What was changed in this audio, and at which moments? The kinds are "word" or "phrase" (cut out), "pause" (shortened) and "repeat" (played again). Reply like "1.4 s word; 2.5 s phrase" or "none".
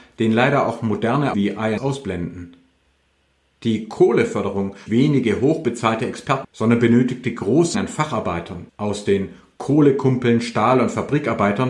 1.3 s word; 1.8 s word; 4.9 s phrase; 6.4 s phrase; 7.7 s word; 8.7 s pause